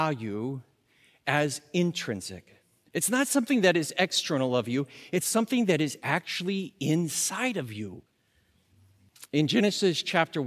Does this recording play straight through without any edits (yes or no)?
yes